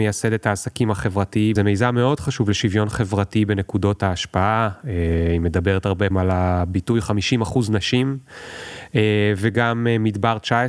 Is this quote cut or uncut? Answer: cut